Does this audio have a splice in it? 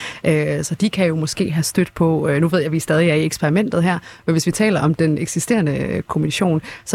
no; 0 cuts

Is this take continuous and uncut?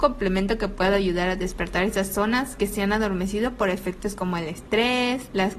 yes; 0 cuts

